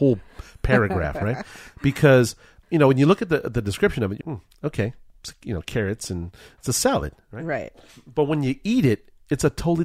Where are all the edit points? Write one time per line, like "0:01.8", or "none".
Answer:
0:02.6
0:04.2